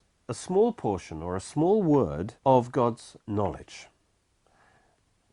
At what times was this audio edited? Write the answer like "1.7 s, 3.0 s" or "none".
2.4 s